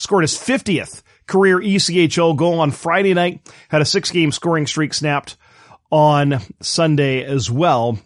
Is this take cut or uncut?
uncut